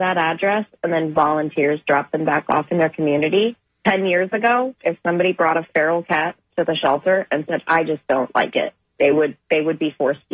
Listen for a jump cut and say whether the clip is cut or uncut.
uncut